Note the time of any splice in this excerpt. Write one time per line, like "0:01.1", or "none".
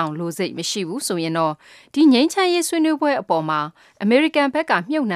none